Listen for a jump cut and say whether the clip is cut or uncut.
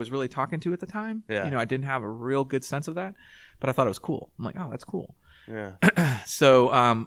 uncut